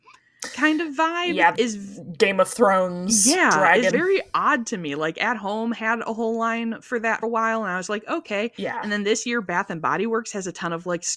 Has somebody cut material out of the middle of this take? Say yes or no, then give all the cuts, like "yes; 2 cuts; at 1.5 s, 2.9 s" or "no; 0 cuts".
yes; 3 cuts; at 1.6 s, 3.9 s, 7.2 s